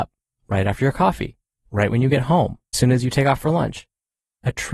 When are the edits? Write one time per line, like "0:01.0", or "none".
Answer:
0:02.7